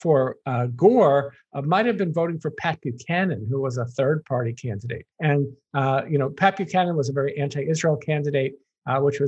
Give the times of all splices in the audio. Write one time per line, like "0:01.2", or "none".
0:05.1